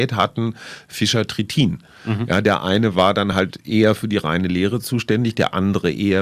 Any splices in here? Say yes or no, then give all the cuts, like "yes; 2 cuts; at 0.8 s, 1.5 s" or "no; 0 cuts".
no; 0 cuts